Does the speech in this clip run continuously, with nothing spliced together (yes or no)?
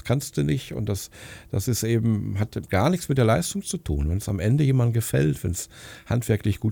yes